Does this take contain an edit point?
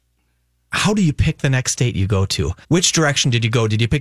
yes; 1 cut; at 2.6 s

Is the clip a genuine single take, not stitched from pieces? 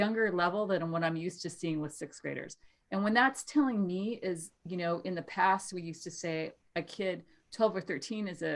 yes; 0 cuts

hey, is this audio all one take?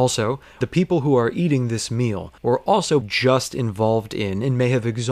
no; 2 cuts; at 2.4 s, 3.0 s

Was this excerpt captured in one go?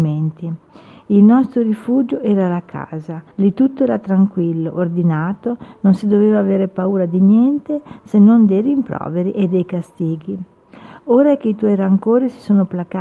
no; 1 cut; at 3.3 s

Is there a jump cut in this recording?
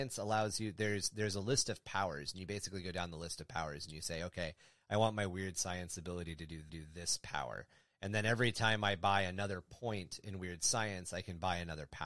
yes; 1 cut; at 6.7 s

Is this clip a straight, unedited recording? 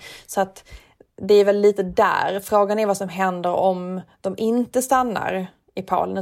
yes; 0 cuts

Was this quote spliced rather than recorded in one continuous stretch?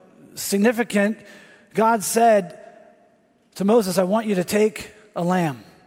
no; 0 cuts

